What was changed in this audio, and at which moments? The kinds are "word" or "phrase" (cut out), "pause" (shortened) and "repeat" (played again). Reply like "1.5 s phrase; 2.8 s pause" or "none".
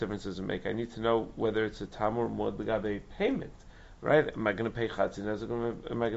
none